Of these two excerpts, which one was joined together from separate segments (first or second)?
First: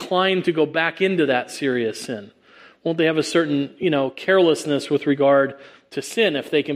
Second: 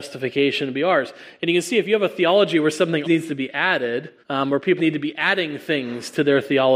second